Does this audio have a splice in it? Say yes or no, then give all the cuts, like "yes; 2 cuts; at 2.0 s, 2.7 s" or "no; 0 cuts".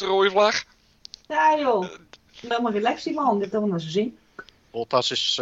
yes; 1 cut; at 2.5 s